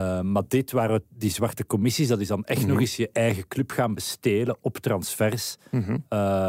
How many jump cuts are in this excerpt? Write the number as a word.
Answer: zero